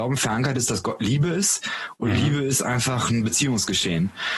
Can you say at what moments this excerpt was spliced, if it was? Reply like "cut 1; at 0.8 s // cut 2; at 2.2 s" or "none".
none